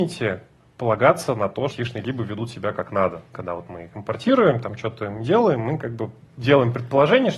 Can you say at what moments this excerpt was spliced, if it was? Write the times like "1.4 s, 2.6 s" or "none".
1.7 s